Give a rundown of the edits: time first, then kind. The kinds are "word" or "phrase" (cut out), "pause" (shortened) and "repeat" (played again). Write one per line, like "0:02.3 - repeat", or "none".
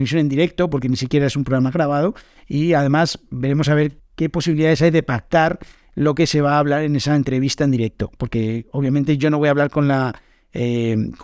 0:04.0 - word